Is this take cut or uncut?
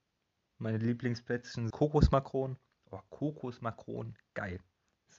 cut